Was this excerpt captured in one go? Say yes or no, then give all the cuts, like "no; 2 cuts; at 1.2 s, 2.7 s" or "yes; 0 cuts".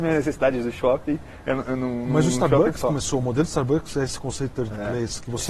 yes; 0 cuts